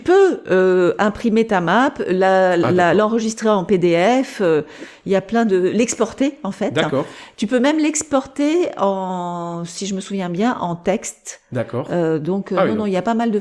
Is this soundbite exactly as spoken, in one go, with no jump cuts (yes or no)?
yes